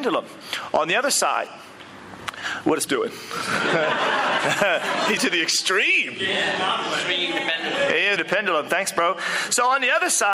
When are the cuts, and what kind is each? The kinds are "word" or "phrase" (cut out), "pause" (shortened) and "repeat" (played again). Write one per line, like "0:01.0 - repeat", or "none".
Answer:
0:02.9 - word
0:05.2 - word
0:08.2 - word